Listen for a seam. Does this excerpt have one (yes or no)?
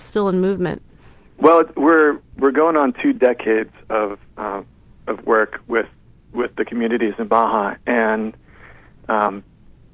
no